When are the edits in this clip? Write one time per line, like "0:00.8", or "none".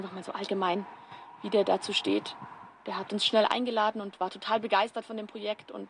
none